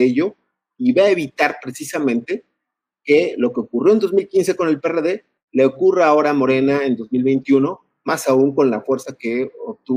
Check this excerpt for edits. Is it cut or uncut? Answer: uncut